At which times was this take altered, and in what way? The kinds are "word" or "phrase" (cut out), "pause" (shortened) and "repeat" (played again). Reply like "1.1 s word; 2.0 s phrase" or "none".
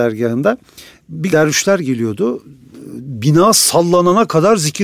1.3 s phrase

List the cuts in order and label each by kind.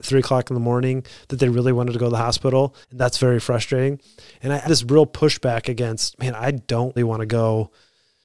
2.8 s pause; 4.7 s word; 7.0 s word

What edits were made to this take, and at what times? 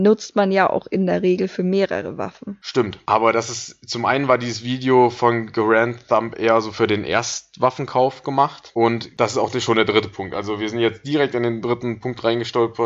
none

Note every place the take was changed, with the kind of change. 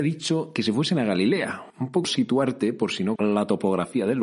1.7 s pause; 2.0 s word; 3.2 s word

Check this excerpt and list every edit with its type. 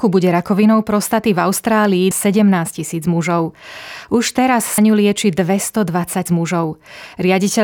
2.1 s phrase; 4.8 s word; 6.3 s word

